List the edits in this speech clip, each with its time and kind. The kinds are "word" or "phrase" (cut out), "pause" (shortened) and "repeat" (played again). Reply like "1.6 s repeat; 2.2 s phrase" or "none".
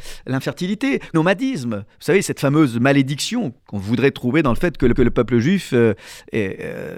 1.1 s phrase; 3.6 s pause; 5.0 s repeat